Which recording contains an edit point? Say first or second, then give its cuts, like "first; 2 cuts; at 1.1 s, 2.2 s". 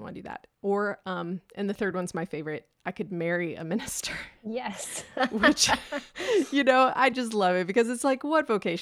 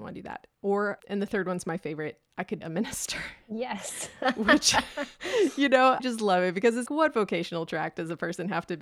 second; 4 cuts; at 1.0 s, 2.6 s, 6.0 s, 6.9 s